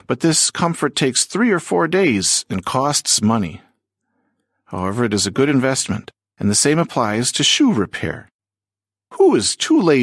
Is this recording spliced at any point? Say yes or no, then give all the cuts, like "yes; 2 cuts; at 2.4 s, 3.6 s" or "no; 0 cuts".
no; 0 cuts